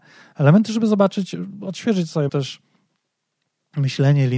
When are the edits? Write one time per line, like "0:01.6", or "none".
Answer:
0:02.3